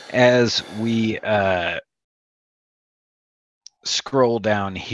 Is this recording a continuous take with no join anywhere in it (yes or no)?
yes